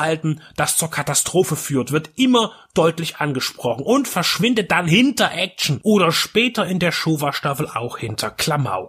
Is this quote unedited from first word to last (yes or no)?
yes